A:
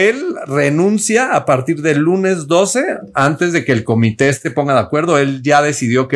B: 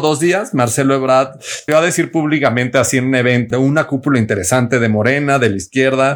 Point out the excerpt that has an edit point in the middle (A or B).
B